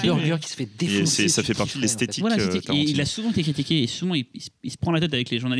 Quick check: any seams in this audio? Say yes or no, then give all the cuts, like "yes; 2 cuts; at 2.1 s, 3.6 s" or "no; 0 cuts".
no; 0 cuts